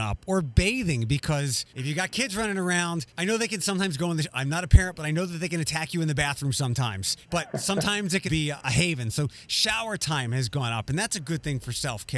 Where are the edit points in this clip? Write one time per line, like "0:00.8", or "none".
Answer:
0:01.7
0:03.1
0:07.2
0:08.3
0:08.6